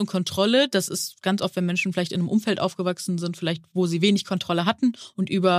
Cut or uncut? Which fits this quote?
uncut